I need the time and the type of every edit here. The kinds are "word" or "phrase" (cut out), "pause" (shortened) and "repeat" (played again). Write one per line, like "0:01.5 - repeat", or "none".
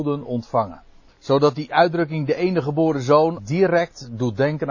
0:01.1 - pause
0:03.4 - word

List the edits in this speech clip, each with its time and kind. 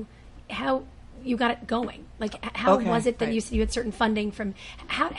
none

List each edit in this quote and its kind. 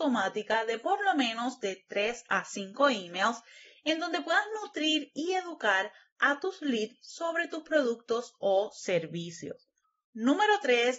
none

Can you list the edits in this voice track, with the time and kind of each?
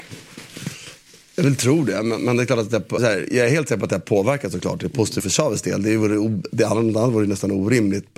0:03.0 - word
0:05.2 - word

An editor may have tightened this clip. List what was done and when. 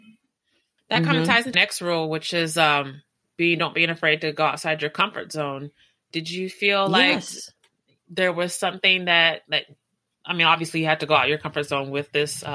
0:01.5 - word

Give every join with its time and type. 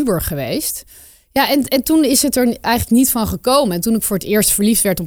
none

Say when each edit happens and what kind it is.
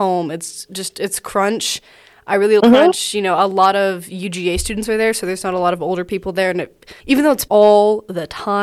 0:02.6 - word
0:07.0 - pause
0:07.5 - word

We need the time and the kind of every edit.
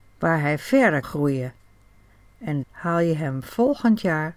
0:01.0 - word
0:02.6 - word

